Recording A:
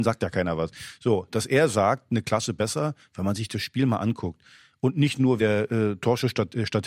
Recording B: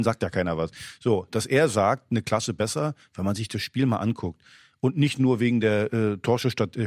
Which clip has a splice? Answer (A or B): A